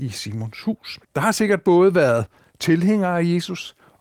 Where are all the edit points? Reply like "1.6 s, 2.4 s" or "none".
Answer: 1.0 s